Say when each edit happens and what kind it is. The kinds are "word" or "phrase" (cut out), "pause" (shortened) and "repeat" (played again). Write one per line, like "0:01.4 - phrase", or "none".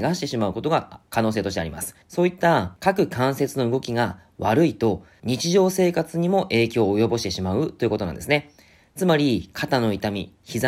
0:02.0 - pause